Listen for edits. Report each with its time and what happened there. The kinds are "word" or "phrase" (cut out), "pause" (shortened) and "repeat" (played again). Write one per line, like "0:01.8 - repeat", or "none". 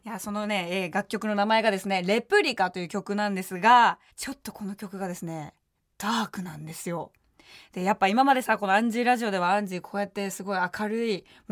0:04.1 - pause